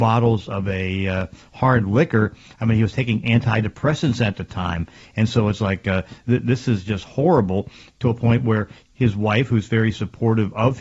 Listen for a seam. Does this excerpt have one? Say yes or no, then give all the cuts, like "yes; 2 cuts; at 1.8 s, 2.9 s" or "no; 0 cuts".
no; 0 cuts